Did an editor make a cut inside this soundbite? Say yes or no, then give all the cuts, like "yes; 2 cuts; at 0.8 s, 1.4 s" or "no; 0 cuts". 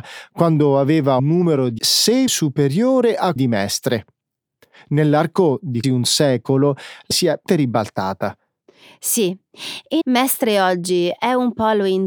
yes; 8 cuts; at 1.2 s, 1.8 s, 2.3 s, 3.4 s, 5.8 s, 7.1 s, 7.5 s, 10.0 s